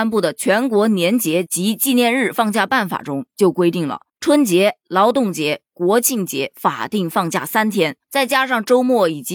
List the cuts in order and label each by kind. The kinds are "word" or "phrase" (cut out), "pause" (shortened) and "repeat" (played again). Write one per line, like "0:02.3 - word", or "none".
0:04.1 - pause
0:08.0 - pause